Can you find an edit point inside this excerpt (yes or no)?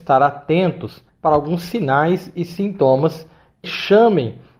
yes